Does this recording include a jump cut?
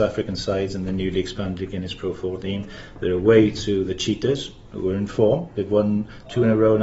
no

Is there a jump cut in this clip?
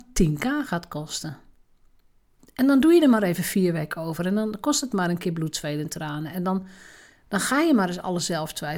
no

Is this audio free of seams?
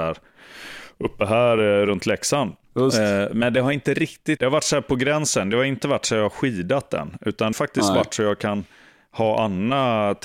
no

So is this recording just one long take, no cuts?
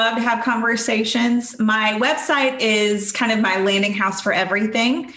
yes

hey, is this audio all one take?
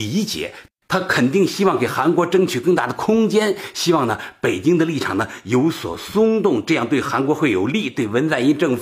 yes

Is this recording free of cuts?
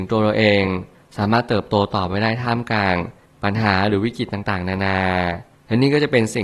yes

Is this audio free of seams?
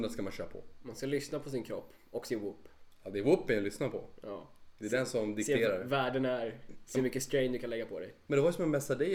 yes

